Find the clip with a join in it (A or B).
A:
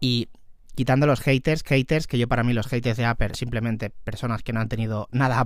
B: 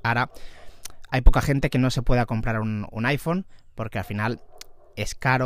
A